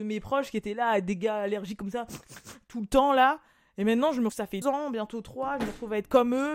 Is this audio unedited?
no; 2 cuts; at 4.3 s, 4.6 s

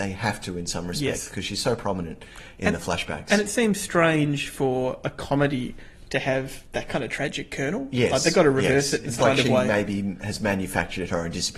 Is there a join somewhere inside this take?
yes; 1 cut; at 9.2 s

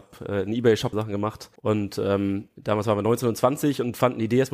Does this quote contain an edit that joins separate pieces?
yes; 2 cuts; at 0.9 s, 1.6 s

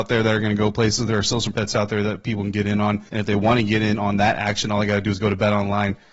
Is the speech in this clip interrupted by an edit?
yes; 2 cuts; at 1.5 s, 3.1 s

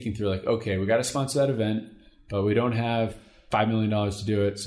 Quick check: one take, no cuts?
yes; 0 cuts

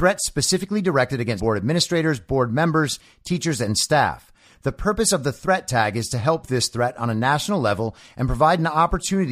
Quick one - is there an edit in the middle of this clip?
yes; 2 cuts; at 1.4 s, 6.4 s

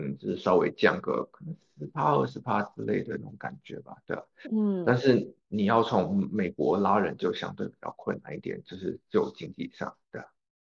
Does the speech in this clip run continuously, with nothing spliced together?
yes; 0 cuts

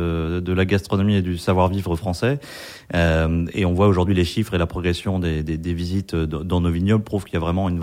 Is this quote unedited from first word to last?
yes; 0 cuts

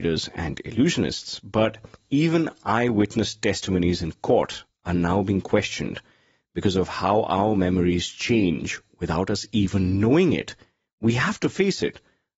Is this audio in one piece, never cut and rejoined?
yes; 0 cuts

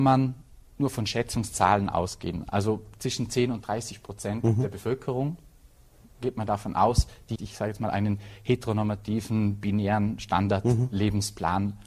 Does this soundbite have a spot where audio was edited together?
yes; 1 cut; at 7.4 s

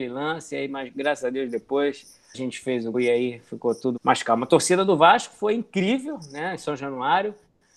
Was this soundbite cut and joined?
yes; 3 cuts; at 2.3 s, 2.9 s, 4.0 s

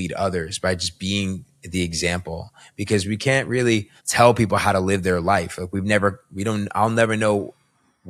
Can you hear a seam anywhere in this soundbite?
yes; 1 cut; at 4.0 s

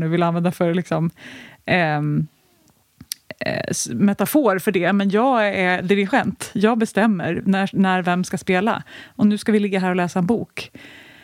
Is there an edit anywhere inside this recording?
no; 0 cuts

